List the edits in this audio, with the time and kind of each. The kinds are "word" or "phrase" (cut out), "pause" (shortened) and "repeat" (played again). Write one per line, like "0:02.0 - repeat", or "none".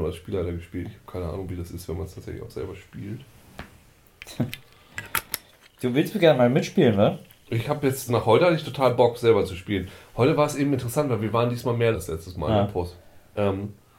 0:08.1 - word
0:11.9 - word